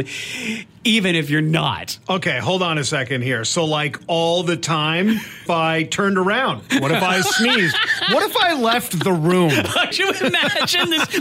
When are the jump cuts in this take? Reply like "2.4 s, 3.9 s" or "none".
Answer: 5.5 s, 9.9 s